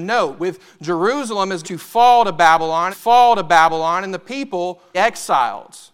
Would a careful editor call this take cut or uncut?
cut